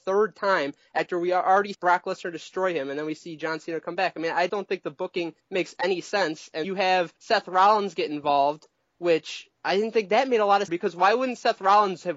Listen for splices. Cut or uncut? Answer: cut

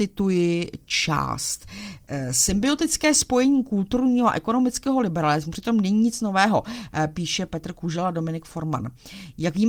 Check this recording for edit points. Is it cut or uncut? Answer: uncut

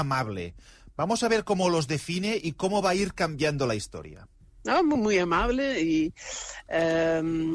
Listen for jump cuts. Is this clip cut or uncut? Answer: uncut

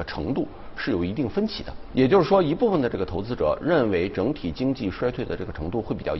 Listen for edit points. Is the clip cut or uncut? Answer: cut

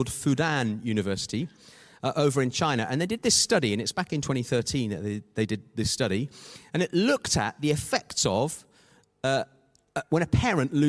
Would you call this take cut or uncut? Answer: uncut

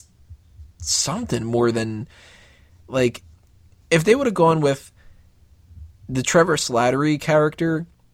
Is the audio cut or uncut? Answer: uncut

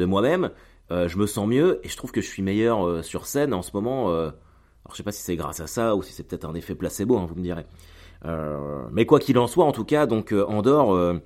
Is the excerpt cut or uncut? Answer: uncut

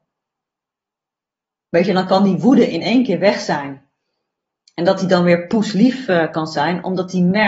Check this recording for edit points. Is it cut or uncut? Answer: uncut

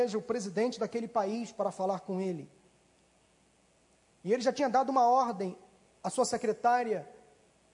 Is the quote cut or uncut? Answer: uncut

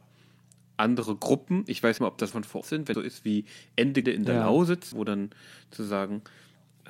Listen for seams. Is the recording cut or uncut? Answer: cut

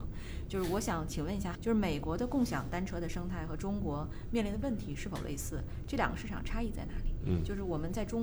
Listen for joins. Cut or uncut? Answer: cut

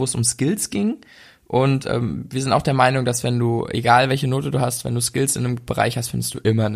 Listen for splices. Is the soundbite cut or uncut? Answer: uncut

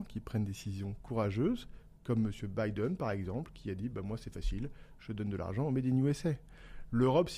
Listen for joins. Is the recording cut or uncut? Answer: uncut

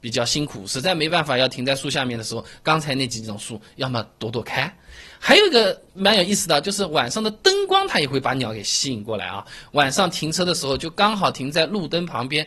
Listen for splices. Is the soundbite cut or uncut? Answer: uncut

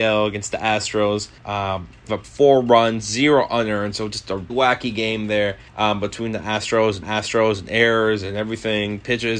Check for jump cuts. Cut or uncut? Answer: cut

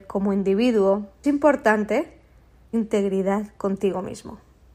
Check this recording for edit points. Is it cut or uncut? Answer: cut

